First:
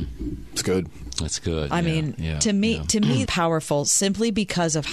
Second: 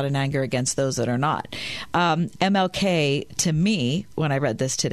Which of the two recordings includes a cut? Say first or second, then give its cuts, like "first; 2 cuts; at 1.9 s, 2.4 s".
first; 1 cut; at 3.3 s